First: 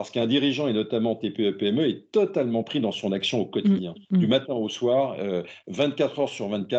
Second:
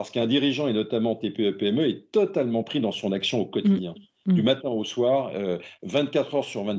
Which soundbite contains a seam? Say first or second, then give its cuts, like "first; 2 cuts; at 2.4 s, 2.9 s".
first; 1 cut; at 4.0 s